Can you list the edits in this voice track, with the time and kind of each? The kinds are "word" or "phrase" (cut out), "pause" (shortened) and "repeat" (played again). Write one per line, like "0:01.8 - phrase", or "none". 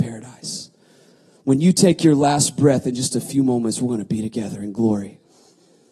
none

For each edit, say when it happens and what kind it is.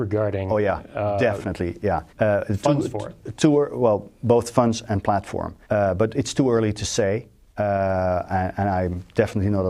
0:02.1 - pause
0:05.6 - pause

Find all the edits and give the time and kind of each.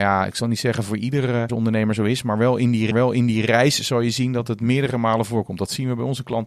0:01.5 - word
0:02.9 - repeat

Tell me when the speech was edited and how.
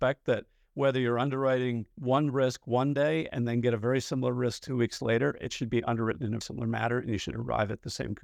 0:01.9 - pause
0:06.4 - word

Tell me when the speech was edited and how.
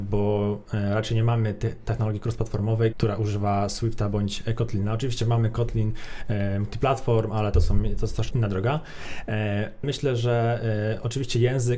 0:02.9 - word
0:08.3 - word
0:09.8 - word

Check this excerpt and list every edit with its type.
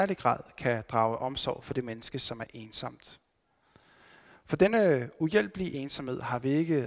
none

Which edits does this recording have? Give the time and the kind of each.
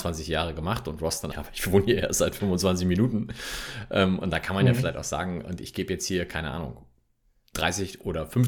0:01.3 - word

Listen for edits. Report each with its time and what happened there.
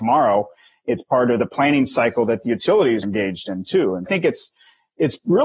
0:03.0 - word
0:04.1 - phrase

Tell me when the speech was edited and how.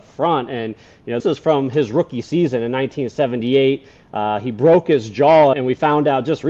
0:01.2 - word
0:05.5 - word

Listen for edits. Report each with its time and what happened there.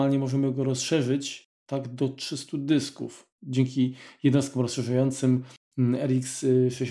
0:03.3 - pause

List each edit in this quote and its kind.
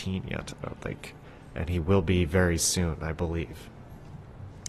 none

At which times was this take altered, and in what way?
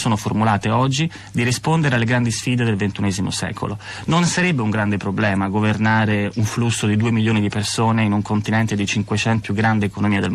0:06.3 - word
0:09.4 - phrase

